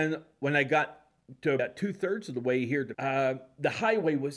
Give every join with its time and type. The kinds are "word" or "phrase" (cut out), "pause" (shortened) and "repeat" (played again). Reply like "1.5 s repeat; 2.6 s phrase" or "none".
1.6 s word; 2.9 s word